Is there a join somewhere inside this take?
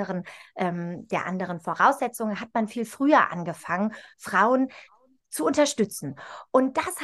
no; 0 cuts

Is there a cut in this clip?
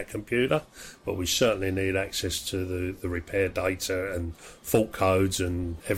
no; 0 cuts

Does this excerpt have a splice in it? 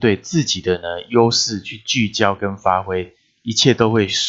no; 0 cuts

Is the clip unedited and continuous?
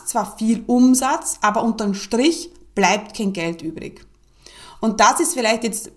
yes; 0 cuts

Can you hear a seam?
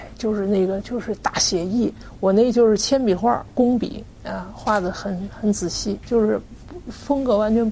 yes; 1 cut; at 6.0 s

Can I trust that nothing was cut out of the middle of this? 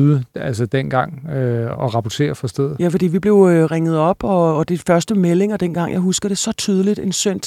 no; 1 cut; at 1.7 s

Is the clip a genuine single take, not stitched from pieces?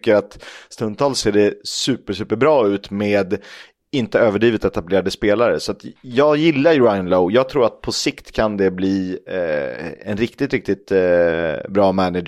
yes; 0 cuts

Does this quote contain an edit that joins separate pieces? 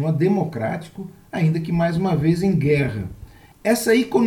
no; 0 cuts

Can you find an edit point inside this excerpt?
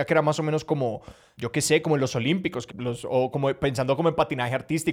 yes; 1 cut; at 2.7 s

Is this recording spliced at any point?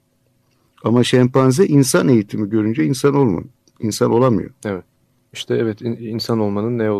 no; 0 cuts

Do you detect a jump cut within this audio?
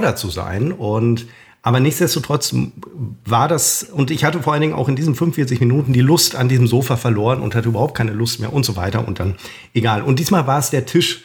no; 0 cuts

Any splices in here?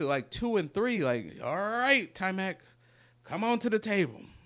no; 0 cuts

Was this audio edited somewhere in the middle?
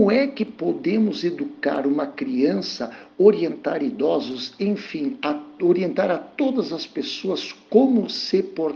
no; 0 cuts

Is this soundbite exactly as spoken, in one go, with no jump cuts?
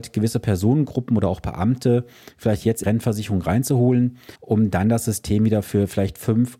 no; 2 cuts; at 2.8 s, 4.4 s

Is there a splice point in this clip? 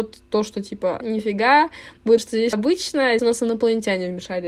yes; 4 cuts; at 1.0 s, 2.2 s, 2.5 s, 3.2 s

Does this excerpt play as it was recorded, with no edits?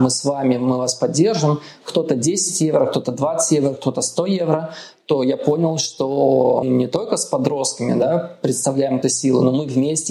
no; 2 cuts; at 6.6 s, 9.0 s

